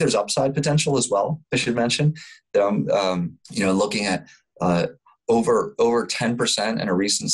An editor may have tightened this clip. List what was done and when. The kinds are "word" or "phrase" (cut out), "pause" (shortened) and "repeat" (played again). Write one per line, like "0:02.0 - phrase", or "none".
0:03.4 - pause